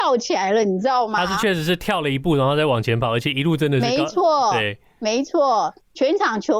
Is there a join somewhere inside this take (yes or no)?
no